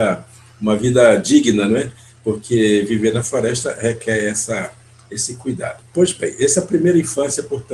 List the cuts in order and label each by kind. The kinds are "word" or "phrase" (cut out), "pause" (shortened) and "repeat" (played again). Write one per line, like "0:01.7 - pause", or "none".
none